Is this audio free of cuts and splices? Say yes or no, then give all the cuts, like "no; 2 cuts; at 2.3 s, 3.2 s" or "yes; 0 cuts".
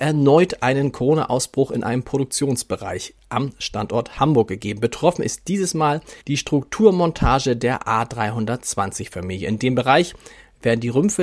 no; 1 cut; at 6.2 s